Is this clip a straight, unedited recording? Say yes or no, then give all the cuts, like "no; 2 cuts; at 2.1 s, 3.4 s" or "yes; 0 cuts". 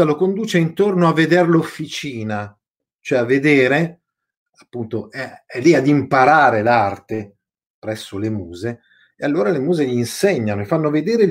yes; 0 cuts